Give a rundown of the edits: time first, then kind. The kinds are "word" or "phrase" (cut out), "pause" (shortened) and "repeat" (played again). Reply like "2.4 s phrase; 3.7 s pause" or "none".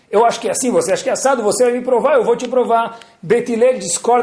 none